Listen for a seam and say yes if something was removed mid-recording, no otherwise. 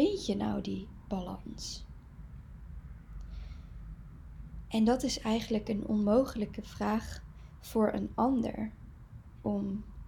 no